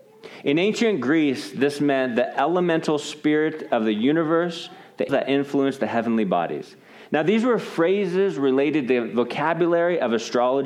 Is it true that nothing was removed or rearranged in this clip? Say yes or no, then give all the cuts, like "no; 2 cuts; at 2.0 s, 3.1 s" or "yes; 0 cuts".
no; 1 cut; at 5.1 s